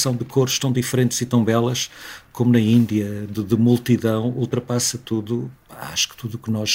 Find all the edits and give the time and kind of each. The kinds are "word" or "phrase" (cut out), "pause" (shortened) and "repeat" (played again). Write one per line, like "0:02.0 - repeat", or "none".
0:03.3 - word